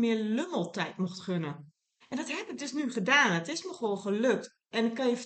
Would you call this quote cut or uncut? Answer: cut